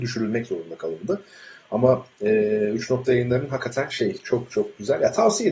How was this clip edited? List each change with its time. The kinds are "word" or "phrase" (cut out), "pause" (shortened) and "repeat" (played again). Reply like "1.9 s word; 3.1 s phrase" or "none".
none